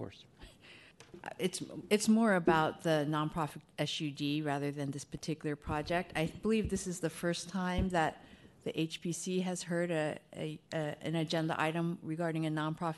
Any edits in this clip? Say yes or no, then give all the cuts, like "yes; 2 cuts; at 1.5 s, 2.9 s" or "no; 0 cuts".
yes; 1 cut; at 10.6 s